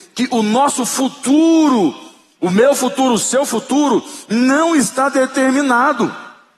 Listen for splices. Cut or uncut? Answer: uncut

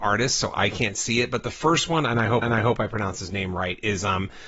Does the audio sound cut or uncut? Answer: cut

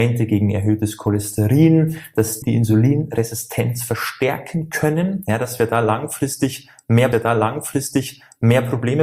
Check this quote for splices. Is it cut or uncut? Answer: cut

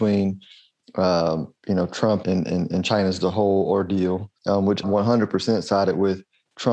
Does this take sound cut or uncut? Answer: cut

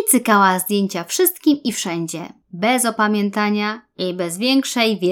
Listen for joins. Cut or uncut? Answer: cut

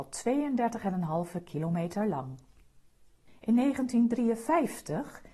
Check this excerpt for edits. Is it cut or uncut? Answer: uncut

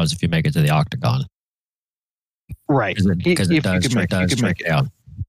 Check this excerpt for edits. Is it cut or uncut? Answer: cut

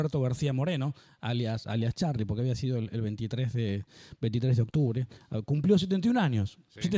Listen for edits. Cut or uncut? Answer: uncut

